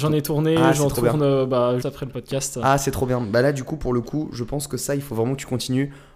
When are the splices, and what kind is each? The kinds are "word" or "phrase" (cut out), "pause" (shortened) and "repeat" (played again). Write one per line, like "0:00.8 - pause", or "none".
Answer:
0:01.8 - word